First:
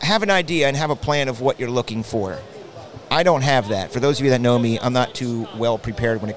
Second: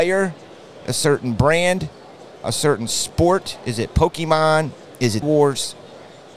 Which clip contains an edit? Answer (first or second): second